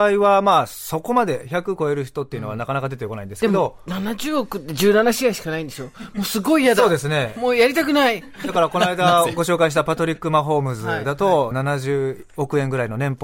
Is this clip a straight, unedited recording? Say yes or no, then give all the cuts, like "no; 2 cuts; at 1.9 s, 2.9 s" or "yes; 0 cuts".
no; 1 cut; at 11.5 s